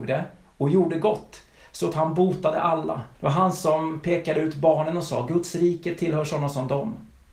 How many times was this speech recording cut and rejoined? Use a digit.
1